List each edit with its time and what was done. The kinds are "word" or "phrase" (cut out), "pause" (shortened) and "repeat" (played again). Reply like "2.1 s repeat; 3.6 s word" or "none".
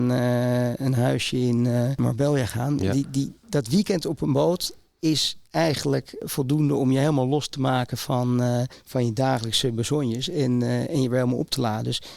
none